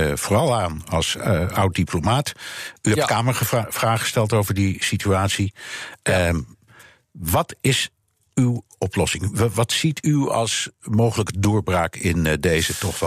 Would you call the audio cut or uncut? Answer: uncut